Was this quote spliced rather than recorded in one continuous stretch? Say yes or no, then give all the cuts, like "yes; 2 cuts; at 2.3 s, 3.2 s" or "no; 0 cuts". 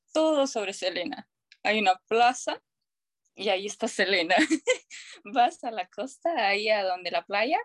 no; 0 cuts